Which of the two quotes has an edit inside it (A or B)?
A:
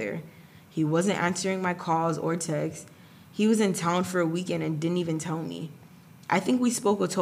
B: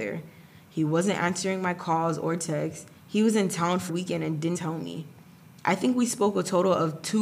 B